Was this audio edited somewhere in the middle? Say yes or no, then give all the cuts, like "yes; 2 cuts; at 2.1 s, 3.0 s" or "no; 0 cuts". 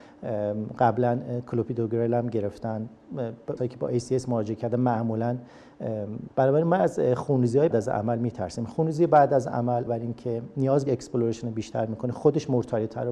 yes; 5 cuts; at 3.6 s, 6.3 s, 7.7 s, 9.9 s, 10.9 s